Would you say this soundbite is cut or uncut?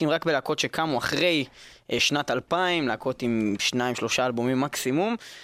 uncut